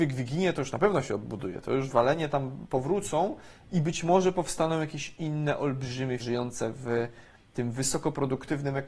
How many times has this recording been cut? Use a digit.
1